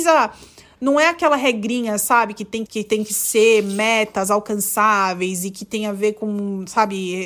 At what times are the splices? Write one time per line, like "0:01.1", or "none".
0:02.7